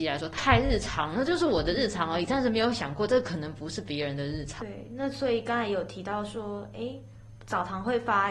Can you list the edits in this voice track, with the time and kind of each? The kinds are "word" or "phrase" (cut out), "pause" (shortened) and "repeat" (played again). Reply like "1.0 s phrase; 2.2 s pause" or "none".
none